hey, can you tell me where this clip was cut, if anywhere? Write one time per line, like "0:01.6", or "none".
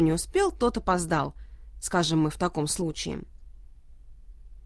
none